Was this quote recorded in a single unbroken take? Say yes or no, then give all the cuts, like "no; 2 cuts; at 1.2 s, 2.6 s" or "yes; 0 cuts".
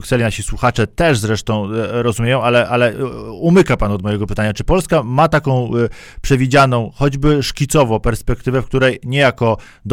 yes; 0 cuts